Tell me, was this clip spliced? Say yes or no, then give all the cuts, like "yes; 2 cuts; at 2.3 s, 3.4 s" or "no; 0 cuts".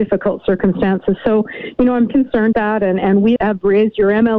yes; 3 cuts; at 2.1 s, 2.5 s, 3.4 s